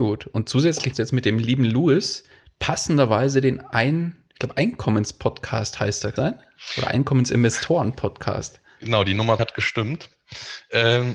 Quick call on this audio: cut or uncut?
cut